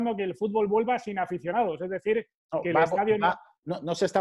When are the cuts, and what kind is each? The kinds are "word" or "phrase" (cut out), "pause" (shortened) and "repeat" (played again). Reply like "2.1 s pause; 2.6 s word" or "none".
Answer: none